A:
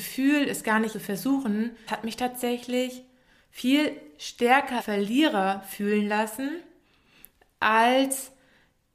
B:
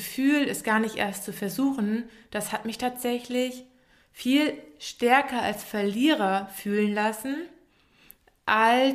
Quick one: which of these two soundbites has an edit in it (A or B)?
A